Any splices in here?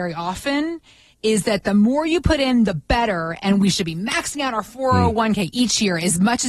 no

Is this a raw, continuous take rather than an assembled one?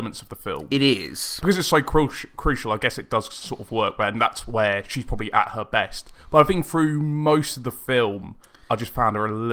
yes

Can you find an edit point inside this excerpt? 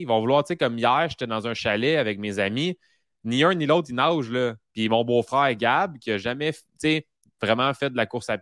no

